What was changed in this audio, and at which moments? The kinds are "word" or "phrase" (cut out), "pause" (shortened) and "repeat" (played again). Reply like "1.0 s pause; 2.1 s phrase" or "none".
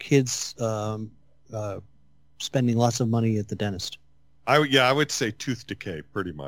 none